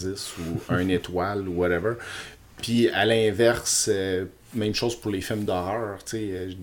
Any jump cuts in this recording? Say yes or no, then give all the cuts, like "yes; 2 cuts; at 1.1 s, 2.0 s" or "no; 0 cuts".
no; 0 cuts